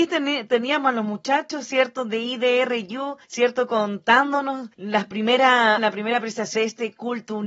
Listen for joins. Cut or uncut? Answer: cut